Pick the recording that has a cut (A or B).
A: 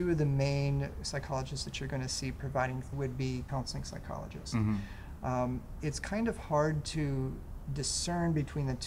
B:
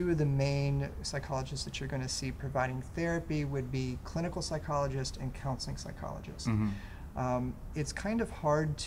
A